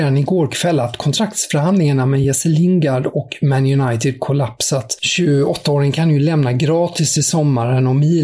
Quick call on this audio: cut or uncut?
uncut